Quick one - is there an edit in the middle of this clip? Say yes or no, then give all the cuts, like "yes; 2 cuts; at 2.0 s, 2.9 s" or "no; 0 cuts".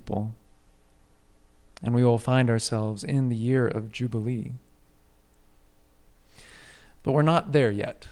no; 0 cuts